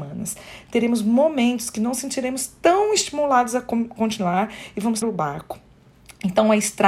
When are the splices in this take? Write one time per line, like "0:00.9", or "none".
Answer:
0:05.0